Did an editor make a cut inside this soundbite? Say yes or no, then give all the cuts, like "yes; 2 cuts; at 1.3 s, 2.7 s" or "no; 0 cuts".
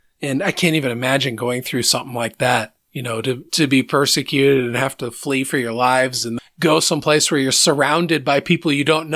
yes; 1 cut; at 6.4 s